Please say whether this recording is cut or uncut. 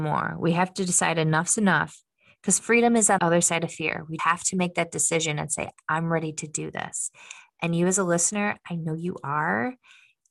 cut